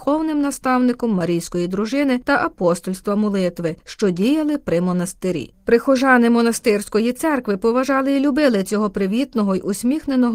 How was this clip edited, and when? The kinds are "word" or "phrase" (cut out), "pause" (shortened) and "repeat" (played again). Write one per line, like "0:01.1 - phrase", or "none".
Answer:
none